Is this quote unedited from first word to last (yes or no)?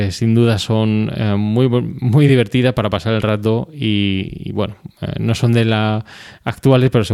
yes